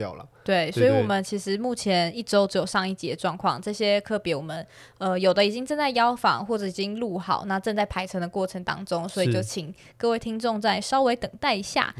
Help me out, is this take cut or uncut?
uncut